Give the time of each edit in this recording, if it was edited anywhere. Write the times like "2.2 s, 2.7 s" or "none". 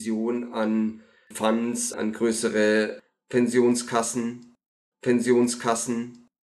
1.3 s, 1.9 s, 4.9 s